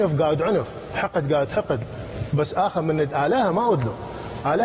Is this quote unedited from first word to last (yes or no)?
yes